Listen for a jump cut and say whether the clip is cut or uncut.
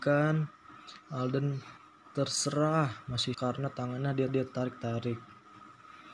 cut